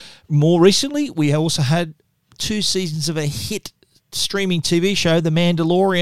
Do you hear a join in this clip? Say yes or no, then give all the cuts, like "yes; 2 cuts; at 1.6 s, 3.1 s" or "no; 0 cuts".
no; 0 cuts